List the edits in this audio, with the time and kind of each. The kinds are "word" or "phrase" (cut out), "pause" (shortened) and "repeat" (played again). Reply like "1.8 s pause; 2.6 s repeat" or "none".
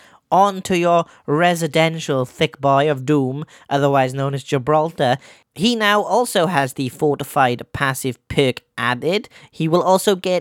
none